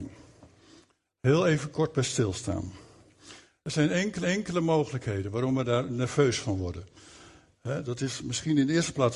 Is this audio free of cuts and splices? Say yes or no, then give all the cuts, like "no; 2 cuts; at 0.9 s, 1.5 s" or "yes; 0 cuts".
no; 1 cut; at 4.2 s